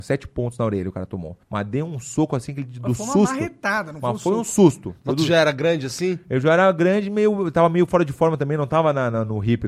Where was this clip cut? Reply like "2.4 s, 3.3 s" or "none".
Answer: 1.4 s

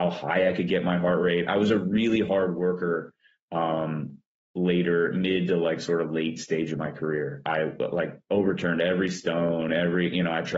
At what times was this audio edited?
none

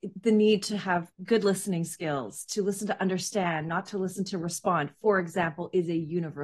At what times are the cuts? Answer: 1.1 s

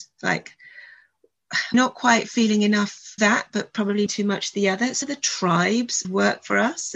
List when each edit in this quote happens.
1.7 s, 3.2 s, 4.1 s, 5.0 s, 6.0 s

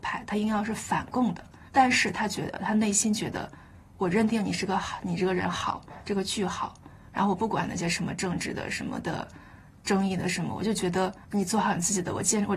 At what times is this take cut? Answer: 1.7 s, 11.2 s

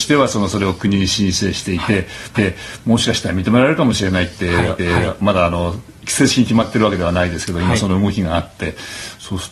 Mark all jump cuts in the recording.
2.4 s, 4.8 s

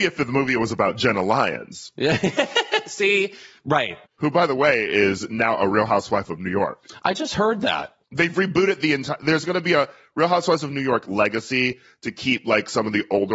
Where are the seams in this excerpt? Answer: 4.1 s, 8.0 s

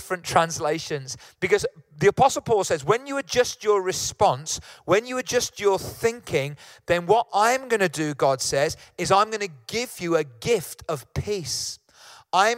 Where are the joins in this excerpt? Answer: none

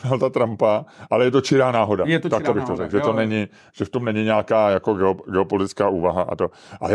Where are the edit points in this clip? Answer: none

